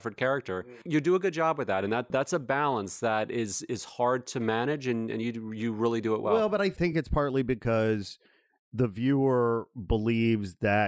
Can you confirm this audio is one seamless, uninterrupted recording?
yes; 0 cuts

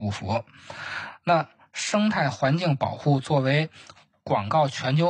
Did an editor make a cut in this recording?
no; 0 cuts

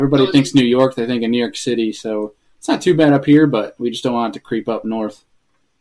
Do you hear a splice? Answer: no; 0 cuts

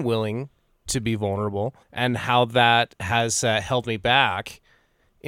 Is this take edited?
yes; 1 cut; at 1.8 s

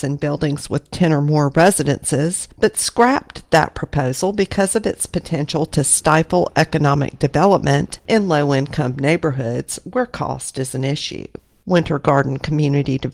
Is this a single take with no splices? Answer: yes; 0 cuts

